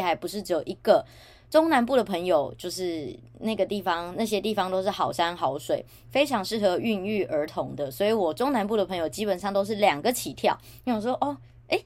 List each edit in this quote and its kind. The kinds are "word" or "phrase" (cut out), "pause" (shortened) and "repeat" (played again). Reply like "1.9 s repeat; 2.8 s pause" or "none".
none